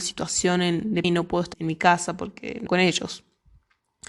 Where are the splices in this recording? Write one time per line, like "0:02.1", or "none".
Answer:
0:01.0
0:01.5
0:02.7